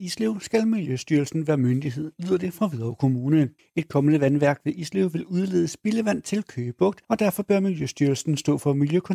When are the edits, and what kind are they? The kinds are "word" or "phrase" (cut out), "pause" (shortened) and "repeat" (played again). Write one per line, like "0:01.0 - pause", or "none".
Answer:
0:03.6 - pause
0:07.0 - pause